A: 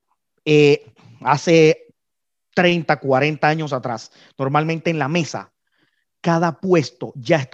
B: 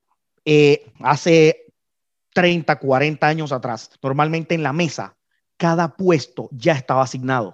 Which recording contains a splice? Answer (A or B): B